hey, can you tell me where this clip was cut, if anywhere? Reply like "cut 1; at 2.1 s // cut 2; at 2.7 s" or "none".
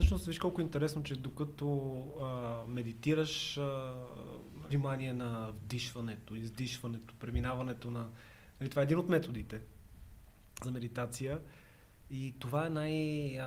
cut 1; at 4.7 s // cut 2; at 10.6 s